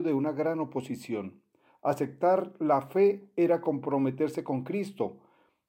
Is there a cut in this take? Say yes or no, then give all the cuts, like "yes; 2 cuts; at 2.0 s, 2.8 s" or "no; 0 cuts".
no; 0 cuts